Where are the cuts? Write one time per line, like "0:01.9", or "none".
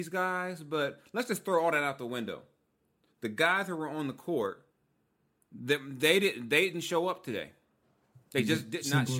none

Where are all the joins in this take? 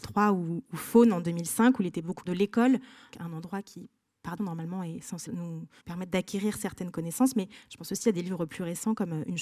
0:02.3
0:03.1
0:04.4
0:05.3
0:05.8

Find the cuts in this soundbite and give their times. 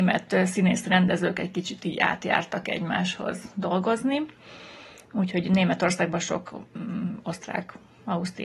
none

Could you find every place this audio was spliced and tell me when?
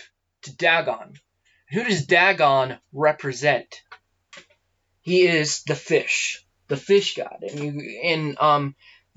none

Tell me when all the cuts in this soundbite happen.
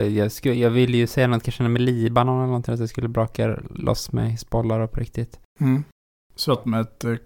none

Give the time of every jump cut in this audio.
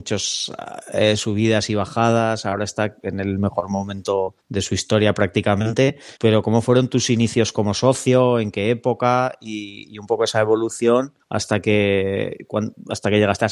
0:04.4
0:06.2
0:11.2

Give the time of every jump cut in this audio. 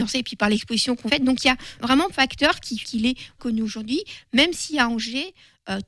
0:01.1
0:01.8
0:02.1
0:02.8
0:03.4

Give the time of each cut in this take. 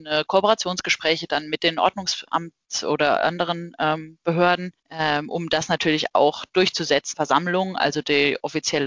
0:04.8
0:07.1

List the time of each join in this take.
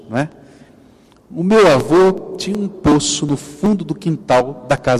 none

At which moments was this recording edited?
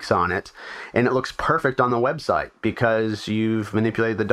none

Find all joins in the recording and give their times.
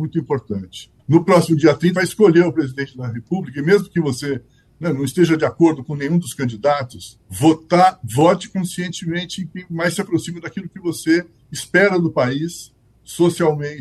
0:01.0
0:02.0
0:07.2

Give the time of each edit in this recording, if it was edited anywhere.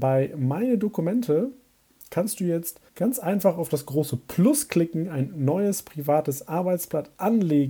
0:02.9

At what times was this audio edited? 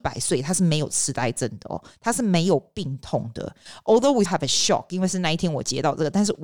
0:04.3

